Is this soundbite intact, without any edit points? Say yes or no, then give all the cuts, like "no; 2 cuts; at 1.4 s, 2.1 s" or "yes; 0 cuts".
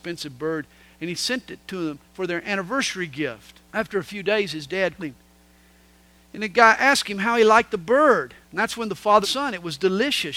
no; 5 cuts; at 2.0 s, 3.7 s, 5.0 s, 8.4 s, 9.2 s